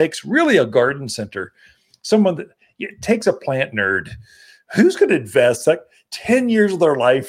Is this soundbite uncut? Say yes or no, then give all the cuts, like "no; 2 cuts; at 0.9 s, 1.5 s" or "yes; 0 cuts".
yes; 0 cuts